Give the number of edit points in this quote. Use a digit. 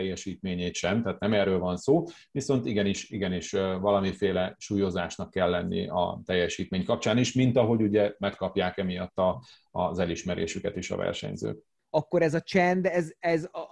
0